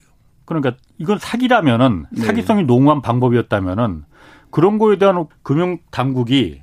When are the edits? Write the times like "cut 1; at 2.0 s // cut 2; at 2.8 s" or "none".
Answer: cut 1; at 5.3 s